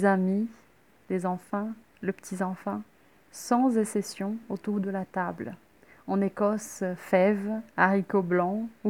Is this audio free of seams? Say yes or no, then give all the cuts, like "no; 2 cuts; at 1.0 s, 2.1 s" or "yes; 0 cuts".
yes; 0 cuts